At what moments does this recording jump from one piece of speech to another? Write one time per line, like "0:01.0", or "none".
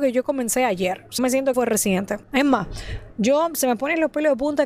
0:01.2
0:01.5
0:02.2